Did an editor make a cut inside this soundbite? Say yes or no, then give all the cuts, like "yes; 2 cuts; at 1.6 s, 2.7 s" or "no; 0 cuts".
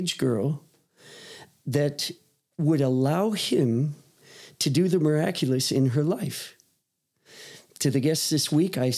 no; 0 cuts